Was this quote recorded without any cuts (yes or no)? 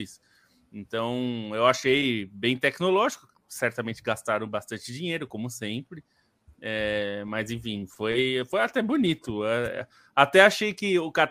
yes